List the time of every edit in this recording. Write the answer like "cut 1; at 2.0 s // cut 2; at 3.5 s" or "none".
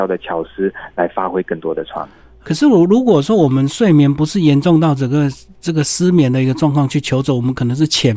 none